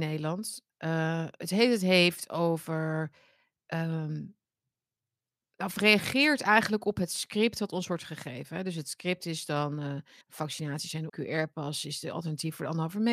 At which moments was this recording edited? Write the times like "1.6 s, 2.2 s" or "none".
10.2 s, 11.1 s

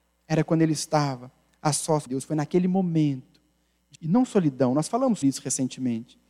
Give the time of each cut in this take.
2.1 s, 3.9 s, 5.2 s

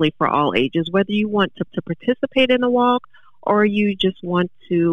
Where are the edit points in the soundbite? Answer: 1.7 s

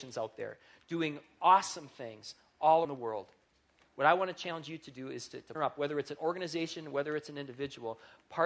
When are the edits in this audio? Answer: 2.8 s, 5.5 s

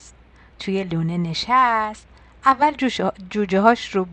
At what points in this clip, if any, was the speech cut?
none

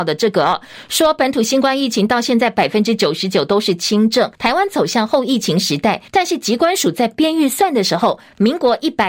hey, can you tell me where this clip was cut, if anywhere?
4.3 s, 6.1 s

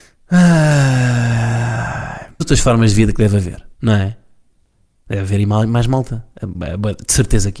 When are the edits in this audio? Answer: 2.4 s, 3.7 s

